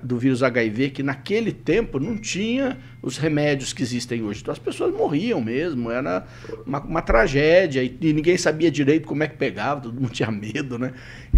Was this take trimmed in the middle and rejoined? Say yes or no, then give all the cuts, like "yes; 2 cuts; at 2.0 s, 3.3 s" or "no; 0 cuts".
no; 0 cuts